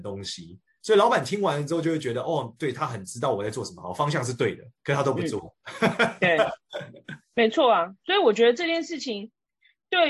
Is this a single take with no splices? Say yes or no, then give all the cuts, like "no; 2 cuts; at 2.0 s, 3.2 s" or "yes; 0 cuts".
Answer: no; 3 cuts; at 4.8 s, 5.6 s, 7.2 s